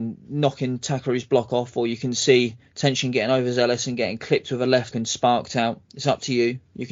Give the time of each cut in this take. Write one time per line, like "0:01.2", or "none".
0:04.9

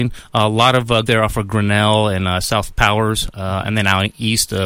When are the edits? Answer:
0:01.0

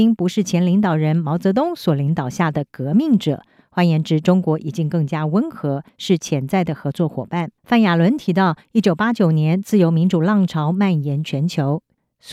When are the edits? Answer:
0:07.6

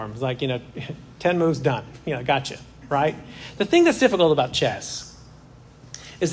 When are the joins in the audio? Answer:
none

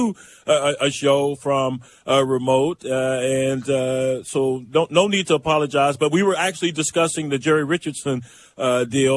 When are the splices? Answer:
none

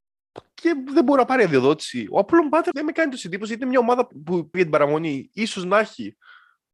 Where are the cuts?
0:02.7
0:04.1
0:04.5

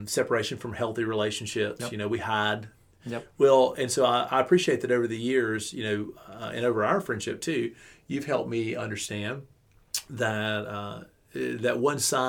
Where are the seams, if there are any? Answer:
none

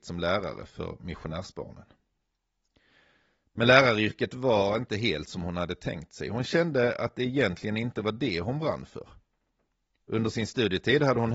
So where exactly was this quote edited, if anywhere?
none

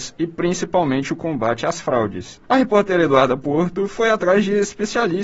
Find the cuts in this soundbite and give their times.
0:02.4

